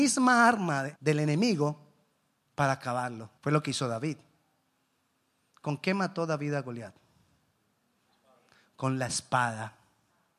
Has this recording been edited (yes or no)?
yes